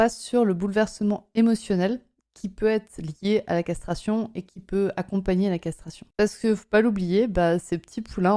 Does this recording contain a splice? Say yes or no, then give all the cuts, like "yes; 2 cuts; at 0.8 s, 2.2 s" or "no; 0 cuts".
no; 0 cuts